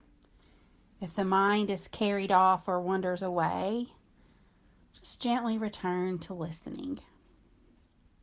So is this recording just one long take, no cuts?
yes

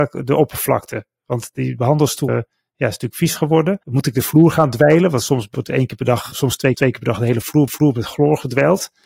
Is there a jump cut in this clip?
yes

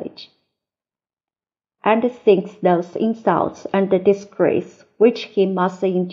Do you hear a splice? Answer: no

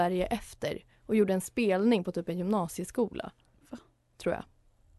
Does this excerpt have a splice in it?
no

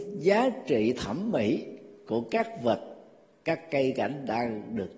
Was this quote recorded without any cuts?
yes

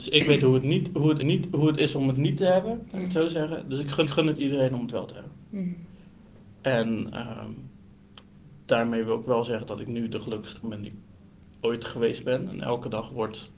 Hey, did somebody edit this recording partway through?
yes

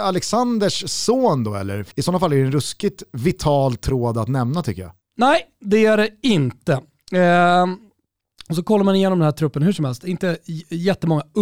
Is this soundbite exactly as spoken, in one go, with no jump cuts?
no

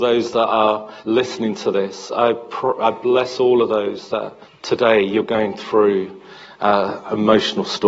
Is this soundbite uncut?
no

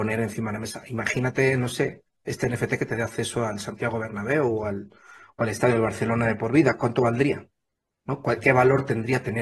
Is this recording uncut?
yes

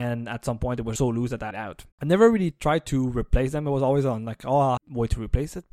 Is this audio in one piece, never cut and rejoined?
no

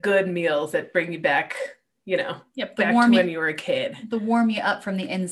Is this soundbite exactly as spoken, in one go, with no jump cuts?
yes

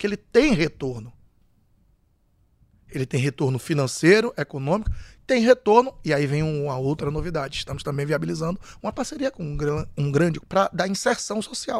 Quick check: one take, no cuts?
no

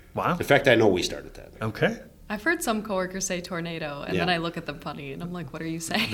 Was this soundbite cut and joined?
no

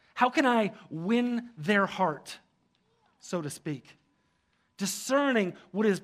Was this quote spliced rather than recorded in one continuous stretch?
no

